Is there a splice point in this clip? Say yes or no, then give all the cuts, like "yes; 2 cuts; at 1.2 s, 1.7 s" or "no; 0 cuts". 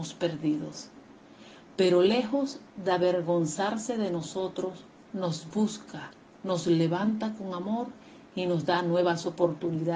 no; 0 cuts